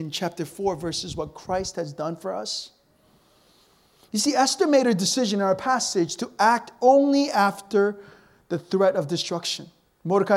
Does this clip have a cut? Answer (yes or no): no